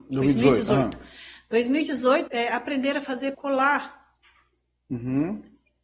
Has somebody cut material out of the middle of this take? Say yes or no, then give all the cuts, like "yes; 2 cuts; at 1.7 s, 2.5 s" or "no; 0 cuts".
yes; 2 cuts; at 2.3 s, 3.3 s